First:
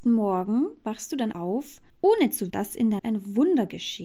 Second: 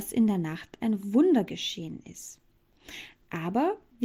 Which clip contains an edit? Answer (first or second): first